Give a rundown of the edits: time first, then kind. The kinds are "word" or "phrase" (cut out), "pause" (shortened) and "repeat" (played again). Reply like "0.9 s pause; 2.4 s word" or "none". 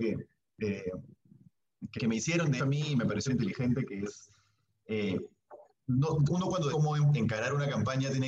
2.0 s word; 2.6 s word; 3.3 s word; 6.3 s word; 6.7 s word